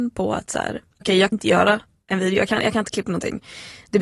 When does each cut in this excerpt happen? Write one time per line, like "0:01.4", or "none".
0:01.0
0:01.3
0:03.0

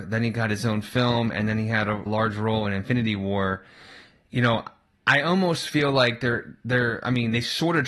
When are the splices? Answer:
0:02.1

